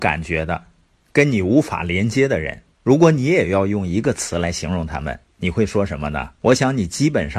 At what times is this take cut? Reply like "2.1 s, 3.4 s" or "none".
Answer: 2.7 s, 6.4 s